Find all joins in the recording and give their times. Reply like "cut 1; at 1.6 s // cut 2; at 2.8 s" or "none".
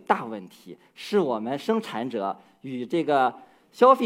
none